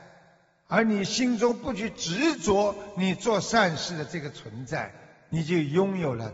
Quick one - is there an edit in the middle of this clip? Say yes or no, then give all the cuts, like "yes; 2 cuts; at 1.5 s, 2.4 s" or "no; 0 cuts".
no; 0 cuts